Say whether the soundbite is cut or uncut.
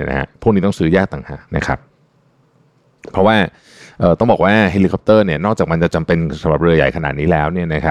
cut